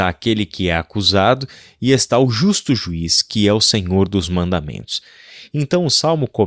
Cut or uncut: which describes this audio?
uncut